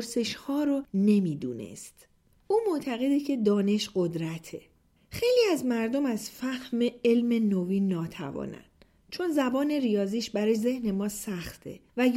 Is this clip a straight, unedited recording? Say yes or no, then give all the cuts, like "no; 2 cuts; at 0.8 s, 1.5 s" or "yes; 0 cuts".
yes; 0 cuts